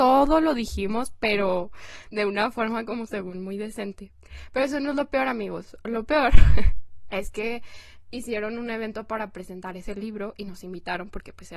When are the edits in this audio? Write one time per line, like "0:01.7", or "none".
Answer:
none